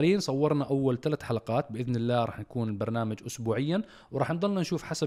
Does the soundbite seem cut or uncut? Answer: uncut